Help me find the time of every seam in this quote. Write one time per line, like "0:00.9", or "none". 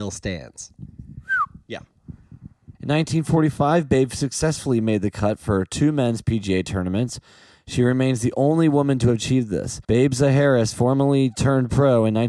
0:09.8